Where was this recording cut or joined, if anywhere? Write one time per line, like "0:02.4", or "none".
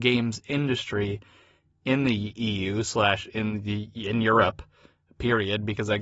none